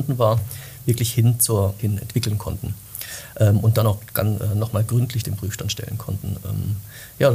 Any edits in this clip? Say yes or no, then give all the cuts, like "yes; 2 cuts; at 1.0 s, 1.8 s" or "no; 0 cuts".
yes; 2 cuts; at 1.8 s, 5.2 s